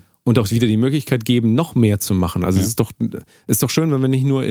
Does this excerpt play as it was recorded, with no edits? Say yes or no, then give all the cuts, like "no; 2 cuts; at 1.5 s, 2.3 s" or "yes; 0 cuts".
yes; 0 cuts